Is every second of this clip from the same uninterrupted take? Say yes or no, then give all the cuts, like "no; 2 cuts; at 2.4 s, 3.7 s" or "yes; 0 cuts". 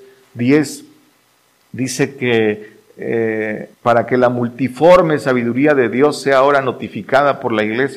no; 1 cut; at 3.7 s